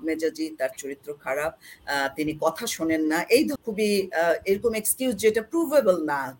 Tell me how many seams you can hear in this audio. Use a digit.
1